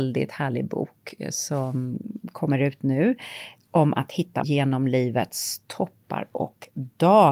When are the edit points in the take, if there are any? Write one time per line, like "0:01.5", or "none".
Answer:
0:04.4